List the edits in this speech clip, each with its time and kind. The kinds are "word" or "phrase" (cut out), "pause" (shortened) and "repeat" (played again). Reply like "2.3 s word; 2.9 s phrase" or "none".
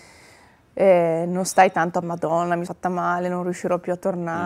2.0 s word; 2.7 s word